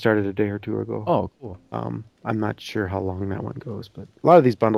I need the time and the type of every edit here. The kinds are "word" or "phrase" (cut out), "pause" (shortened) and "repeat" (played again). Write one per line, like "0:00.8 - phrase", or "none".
0:02.1 - pause